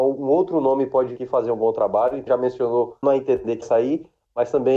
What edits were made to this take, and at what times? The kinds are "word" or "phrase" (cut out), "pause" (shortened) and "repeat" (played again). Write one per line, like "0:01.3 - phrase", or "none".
0:01.2 - word
0:02.3 - word
0:03.0 - word
0:03.6 - word